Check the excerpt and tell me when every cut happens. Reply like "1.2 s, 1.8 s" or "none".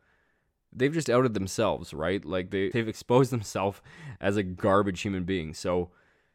2.7 s